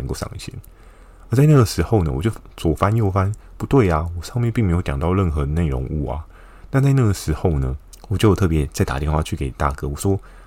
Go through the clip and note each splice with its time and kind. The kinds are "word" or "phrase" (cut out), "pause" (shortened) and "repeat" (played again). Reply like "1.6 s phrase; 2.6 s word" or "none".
none

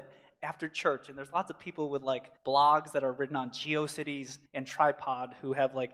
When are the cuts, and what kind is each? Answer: 2.4 s pause; 4.5 s pause

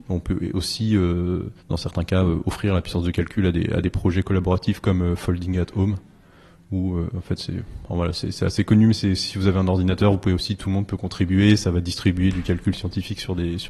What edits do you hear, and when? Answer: 1.6 s pause

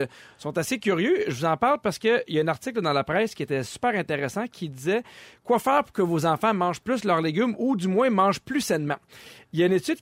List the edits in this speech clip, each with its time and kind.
none

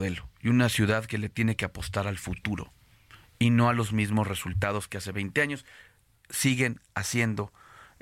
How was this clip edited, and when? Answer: none

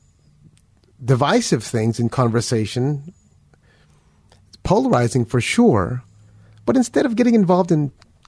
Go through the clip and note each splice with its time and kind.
none

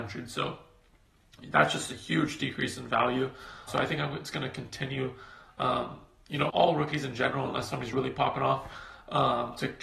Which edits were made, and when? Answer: 3.7 s word; 6.5 s word; 7.9 s word

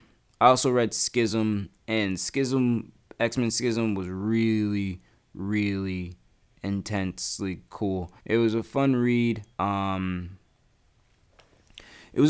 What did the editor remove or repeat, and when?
6.5 s word; 8.2 s pause; 9.5 s pause

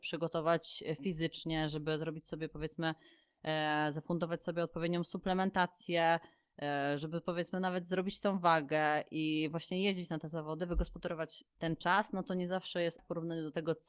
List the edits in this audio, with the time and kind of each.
13.0 s word

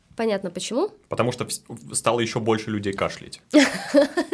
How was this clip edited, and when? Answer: none

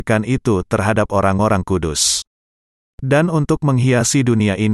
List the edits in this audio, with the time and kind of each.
none

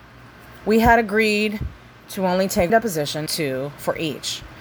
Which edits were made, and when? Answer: 1.9 s pause; 2.7 s word; 3.3 s word

